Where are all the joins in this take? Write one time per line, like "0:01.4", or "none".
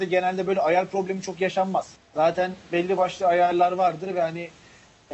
0:02.0